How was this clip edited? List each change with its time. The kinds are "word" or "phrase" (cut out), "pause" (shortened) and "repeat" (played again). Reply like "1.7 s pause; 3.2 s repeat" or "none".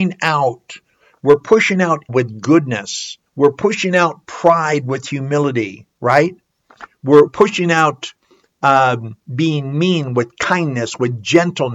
2.1 s word; 3.3 s pause; 5.9 s pause; 7.3 s phrase; 9.2 s pause

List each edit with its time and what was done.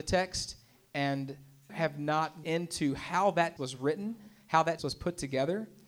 1.7 s word; 2.4 s word; 3.6 s word; 4.8 s word

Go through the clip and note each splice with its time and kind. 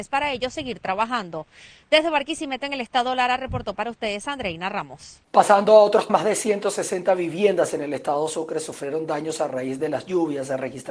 5.3 s pause; 6.1 s word

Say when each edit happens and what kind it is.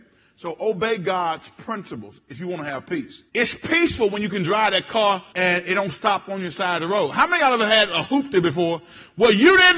3.3 s pause; 5.3 s pause

